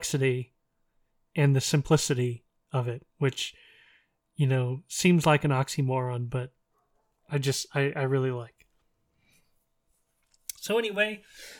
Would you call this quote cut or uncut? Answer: uncut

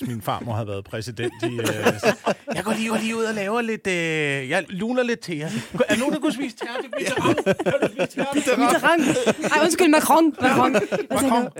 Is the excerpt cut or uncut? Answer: cut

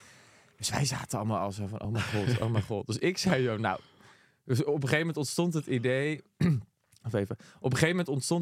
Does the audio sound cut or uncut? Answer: uncut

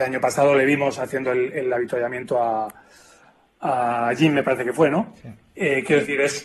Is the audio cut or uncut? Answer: uncut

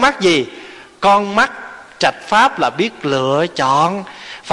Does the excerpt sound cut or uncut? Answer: uncut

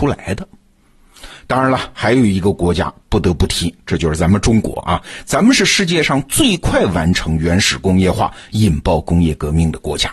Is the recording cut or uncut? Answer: uncut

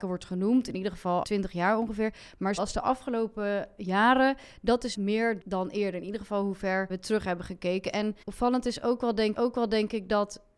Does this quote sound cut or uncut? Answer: cut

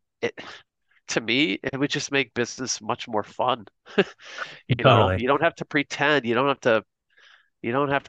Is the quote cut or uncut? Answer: uncut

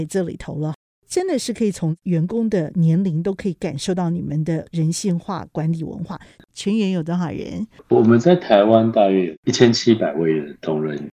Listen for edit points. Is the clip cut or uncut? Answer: uncut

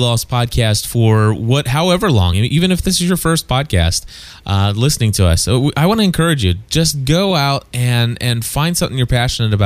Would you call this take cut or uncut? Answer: uncut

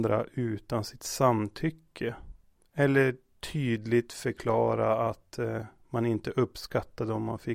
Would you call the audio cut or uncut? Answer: uncut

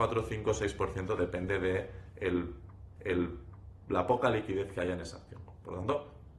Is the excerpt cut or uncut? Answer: cut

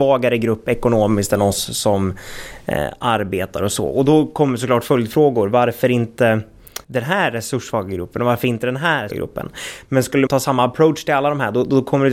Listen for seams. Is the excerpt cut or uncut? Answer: cut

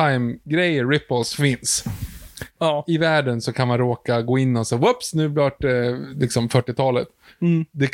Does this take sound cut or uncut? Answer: uncut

